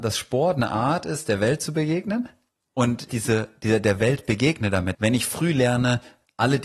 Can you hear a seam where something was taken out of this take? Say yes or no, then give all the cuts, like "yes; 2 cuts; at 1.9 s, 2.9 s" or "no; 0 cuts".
yes; 2 cuts; at 3.1 s, 4.9 s